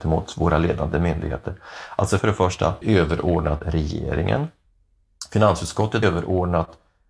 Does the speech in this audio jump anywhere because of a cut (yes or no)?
yes